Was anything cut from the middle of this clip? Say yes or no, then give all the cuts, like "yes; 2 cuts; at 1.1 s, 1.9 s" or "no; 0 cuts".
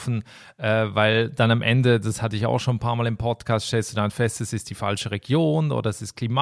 no; 0 cuts